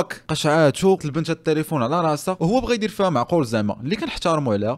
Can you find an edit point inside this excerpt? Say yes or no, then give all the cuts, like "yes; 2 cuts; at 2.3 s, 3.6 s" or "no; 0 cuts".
yes; 1 cut; at 1.0 s